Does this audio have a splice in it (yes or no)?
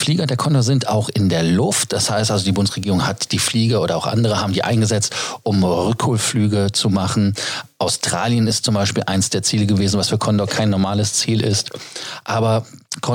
no